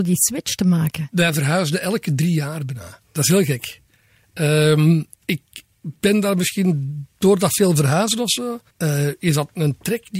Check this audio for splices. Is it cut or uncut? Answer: cut